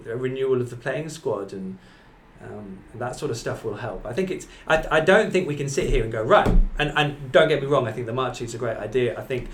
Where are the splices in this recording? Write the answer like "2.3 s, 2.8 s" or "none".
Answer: none